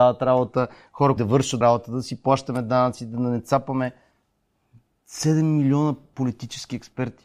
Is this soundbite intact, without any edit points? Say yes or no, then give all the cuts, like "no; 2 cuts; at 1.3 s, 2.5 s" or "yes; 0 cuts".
no; 2 cuts; at 1.2 s, 1.6 s